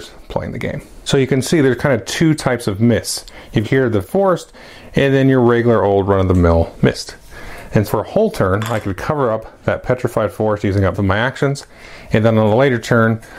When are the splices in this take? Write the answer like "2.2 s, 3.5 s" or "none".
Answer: 3.6 s, 4.0 s, 7.9 s, 10.9 s